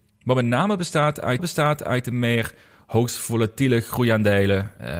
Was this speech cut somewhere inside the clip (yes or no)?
yes